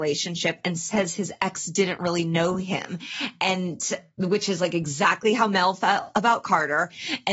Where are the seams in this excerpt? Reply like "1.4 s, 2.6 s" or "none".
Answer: none